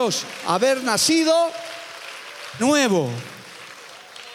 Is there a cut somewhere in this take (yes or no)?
yes